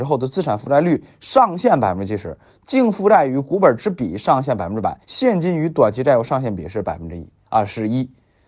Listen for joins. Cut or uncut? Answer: cut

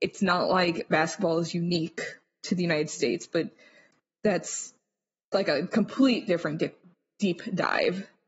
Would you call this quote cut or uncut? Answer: uncut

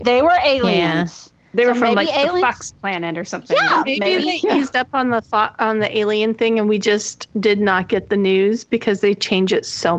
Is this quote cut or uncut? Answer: cut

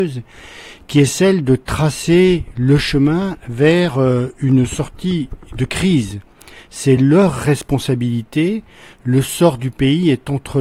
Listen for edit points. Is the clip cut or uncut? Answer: uncut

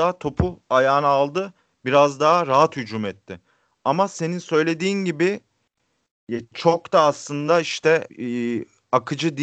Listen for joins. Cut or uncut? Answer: cut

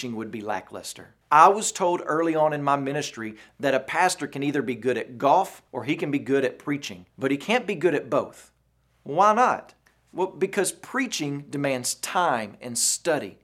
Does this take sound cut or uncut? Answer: cut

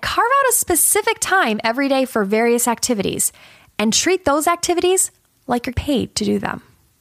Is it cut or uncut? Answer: cut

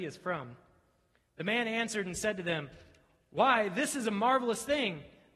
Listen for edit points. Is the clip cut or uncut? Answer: uncut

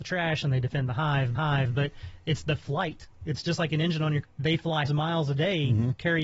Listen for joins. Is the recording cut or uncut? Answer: cut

